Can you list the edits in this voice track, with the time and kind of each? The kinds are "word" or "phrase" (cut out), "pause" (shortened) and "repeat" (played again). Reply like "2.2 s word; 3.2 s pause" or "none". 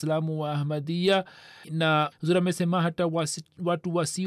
1.6 s word; 2.1 s phrase